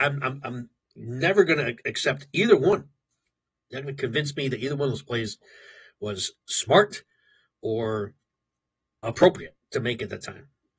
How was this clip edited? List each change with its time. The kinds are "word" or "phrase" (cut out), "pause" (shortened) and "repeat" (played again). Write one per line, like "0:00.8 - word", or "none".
0:09.0 - word